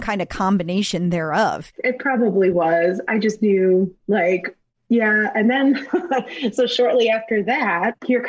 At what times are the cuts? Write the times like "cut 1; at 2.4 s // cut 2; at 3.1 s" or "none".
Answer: none